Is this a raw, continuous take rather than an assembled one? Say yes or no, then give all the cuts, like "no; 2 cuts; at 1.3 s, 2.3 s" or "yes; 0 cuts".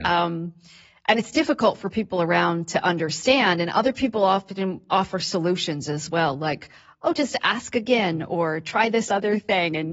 yes; 0 cuts